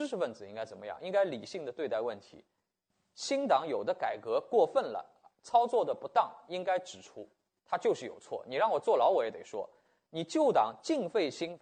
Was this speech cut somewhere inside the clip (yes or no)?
no